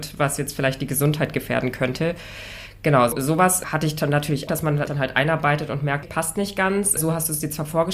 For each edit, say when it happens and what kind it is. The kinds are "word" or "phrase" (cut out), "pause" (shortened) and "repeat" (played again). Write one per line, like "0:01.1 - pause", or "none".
0:04.5 - word
0:04.9 - word
0:06.0 - word